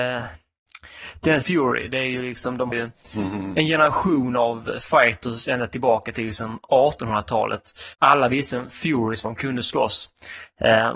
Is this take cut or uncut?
cut